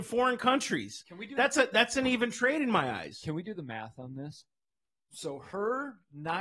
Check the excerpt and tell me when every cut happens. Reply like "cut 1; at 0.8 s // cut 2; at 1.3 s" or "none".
none

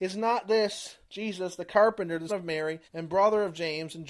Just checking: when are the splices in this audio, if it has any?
cut 1; at 1.0 s // cut 2; at 2.3 s // cut 3; at 2.8 s

